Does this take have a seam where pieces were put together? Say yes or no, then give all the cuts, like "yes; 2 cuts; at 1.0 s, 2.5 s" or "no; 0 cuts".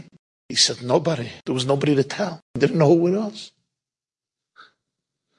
yes; 2 cuts; at 1.4 s, 2.4 s